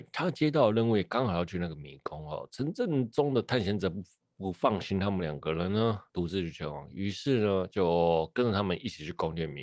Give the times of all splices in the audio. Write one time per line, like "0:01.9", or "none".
0:06.1